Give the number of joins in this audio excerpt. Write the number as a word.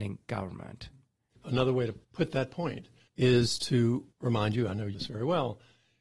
four